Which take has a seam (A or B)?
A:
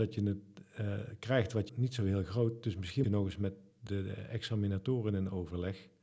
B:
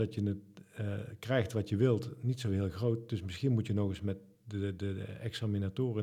A